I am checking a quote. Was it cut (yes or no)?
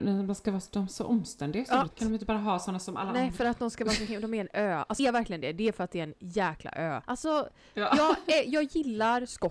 yes